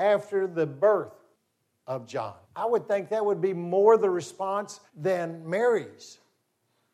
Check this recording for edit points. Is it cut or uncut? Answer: cut